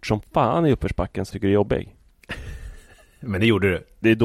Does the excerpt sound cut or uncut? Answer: cut